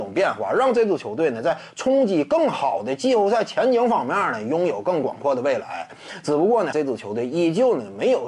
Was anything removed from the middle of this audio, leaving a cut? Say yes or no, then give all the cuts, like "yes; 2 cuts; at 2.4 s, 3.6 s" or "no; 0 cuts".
yes; 1 cut; at 6.7 s